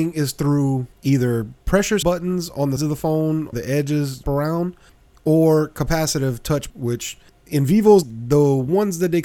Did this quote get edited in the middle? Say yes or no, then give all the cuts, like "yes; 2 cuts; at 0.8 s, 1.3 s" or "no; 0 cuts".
yes; 6 cuts; at 2.0 s, 2.8 s, 3.5 s, 4.2 s, 6.7 s, 8.0 s